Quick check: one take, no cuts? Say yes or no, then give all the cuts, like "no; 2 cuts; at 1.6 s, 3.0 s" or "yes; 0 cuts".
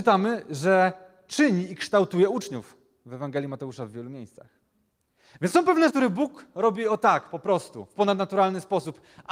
no; 1 cut; at 5.9 s